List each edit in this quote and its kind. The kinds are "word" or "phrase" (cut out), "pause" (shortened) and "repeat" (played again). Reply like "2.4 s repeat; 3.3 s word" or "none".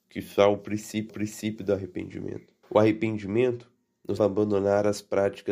1.1 s repeat; 2.6 s pause; 4.2 s word